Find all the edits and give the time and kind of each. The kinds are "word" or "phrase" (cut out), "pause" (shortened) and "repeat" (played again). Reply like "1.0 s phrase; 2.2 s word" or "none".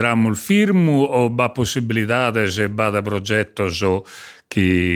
none